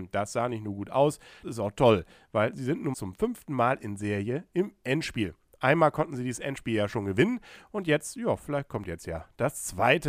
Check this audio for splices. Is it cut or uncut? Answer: cut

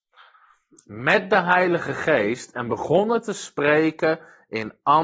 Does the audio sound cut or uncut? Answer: uncut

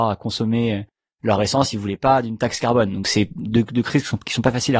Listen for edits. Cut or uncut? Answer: cut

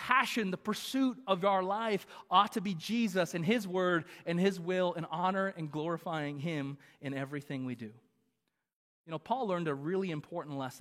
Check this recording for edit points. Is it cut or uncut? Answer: uncut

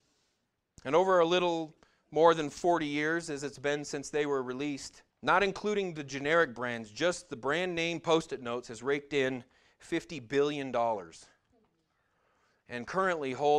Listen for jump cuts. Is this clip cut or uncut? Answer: cut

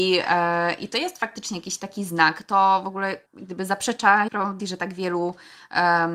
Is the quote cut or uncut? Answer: cut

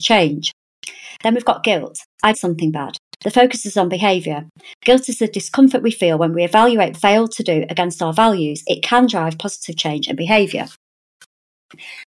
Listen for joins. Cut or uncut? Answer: cut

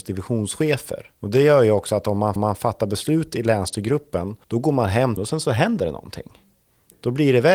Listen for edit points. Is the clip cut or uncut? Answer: cut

